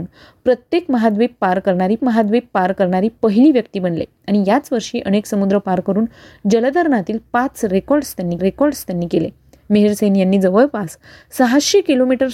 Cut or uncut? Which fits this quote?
cut